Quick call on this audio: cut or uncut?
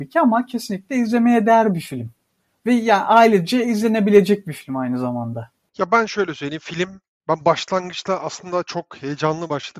uncut